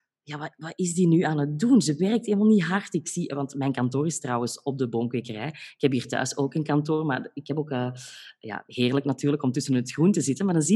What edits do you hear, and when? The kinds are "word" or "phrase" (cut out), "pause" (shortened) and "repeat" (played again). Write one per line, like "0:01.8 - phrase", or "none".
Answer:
none